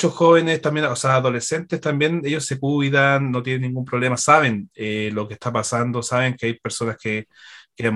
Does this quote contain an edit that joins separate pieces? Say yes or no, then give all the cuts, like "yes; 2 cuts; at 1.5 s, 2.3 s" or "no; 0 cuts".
no; 0 cuts